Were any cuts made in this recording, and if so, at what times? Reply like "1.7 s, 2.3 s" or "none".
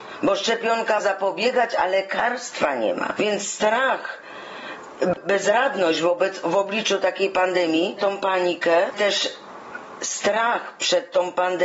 1.0 s, 8.0 s, 8.9 s